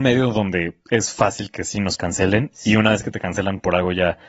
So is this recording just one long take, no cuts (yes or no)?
yes